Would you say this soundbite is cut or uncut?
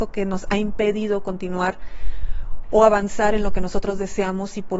uncut